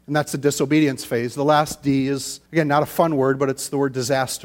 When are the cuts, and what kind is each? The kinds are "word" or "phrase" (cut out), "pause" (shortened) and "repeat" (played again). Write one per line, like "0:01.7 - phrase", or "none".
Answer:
0:02.5 - pause